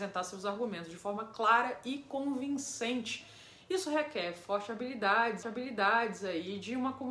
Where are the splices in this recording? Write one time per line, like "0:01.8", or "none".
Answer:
0:05.4